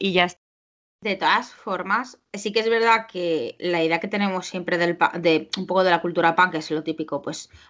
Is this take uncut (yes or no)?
yes